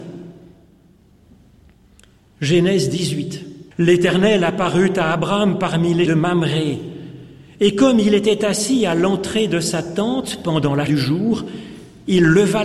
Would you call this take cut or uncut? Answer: cut